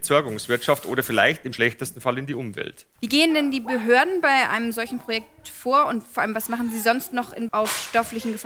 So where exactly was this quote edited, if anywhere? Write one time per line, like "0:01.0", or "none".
0:03.0
0:07.5